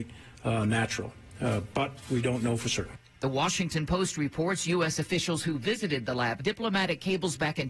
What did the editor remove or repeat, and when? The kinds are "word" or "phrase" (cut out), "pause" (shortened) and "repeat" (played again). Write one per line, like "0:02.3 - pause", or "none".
0:06.4 - phrase